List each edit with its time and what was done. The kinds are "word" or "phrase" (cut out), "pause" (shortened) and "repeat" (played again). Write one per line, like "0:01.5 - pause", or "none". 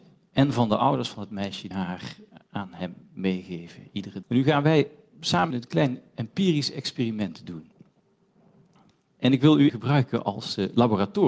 0:01.7 - word
0:04.2 - word
0:05.5 - word
0:09.7 - word